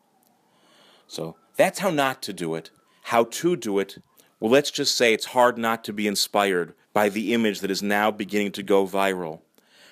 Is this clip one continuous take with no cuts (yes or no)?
no